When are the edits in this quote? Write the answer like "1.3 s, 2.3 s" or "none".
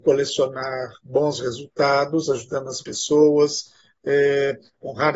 none